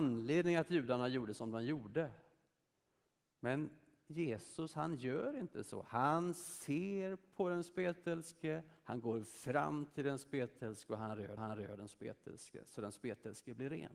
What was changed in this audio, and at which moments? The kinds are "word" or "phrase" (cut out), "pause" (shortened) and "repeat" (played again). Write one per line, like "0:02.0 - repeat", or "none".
0:11.4 - repeat